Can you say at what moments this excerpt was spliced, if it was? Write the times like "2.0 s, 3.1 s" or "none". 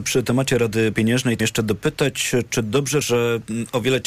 0.9 s, 1.4 s, 3.0 s